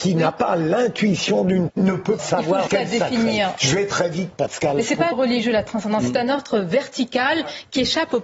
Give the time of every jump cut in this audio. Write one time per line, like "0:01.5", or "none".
0:01.7
0:02.2
0:02.7
0:04.3
0:05.1